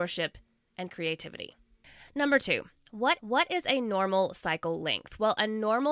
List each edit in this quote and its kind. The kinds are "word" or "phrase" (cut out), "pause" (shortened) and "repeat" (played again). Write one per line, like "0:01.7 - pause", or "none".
0:03.2 - repeat